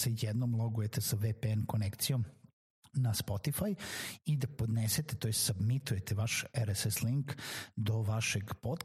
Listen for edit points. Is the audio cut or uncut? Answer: uncut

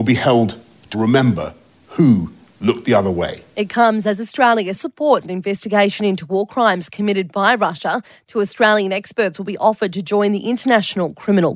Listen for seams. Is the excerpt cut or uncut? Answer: cut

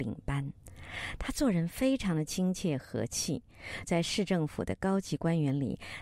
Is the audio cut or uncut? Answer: cut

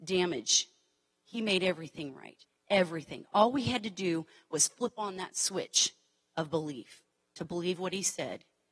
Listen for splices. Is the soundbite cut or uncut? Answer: uncut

